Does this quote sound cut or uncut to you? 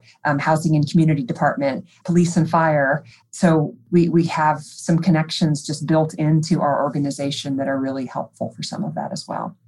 uncut